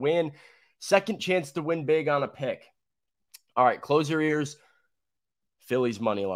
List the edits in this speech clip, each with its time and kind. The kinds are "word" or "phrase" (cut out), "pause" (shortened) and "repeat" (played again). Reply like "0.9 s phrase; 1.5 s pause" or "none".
none